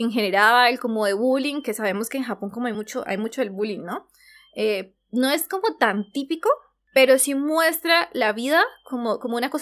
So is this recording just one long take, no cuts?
yes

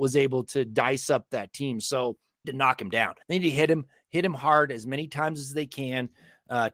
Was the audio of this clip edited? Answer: yes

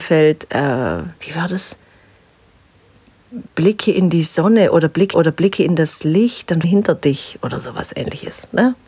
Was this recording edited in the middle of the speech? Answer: yes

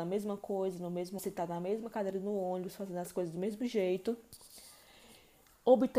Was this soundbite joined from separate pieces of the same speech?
yes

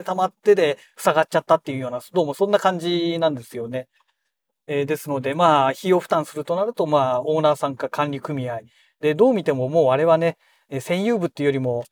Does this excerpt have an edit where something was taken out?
no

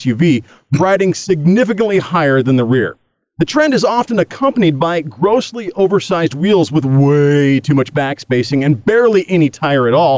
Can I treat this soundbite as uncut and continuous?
yes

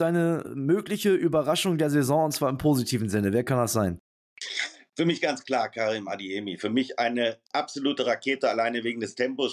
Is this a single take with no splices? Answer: yes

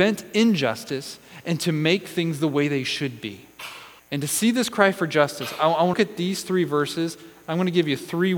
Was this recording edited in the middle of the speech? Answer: yes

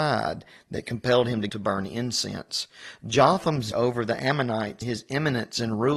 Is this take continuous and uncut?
no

